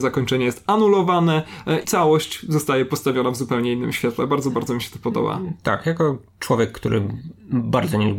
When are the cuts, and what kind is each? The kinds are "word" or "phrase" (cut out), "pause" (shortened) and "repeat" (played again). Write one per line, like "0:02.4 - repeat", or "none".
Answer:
0:01.8 - word